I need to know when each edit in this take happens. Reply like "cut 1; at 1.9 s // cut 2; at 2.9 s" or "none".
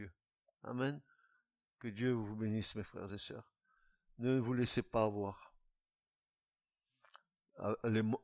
none